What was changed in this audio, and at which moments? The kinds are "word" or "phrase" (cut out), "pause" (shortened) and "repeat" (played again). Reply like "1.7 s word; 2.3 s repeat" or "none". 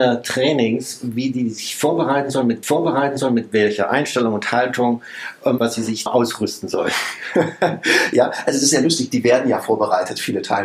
2.6 s repeat; 5.6 s word; 6.1 s word